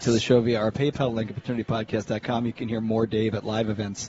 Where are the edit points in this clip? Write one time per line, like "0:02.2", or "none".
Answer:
none